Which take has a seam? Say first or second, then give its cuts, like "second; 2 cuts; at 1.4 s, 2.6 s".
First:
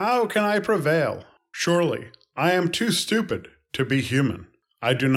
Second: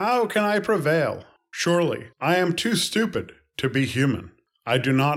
second; 1 cut; at 2.1 s